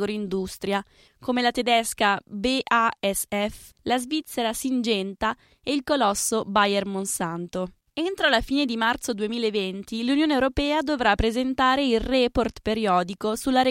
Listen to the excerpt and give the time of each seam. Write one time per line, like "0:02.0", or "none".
none